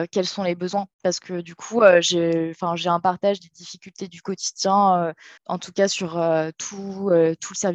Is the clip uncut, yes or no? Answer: no